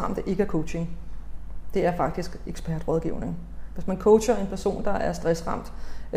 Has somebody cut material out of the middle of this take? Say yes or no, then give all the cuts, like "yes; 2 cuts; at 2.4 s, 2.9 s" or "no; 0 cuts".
no; 0 cuts